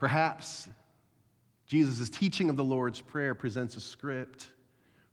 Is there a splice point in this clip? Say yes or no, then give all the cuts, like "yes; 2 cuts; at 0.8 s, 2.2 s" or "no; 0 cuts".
no; 0 cuts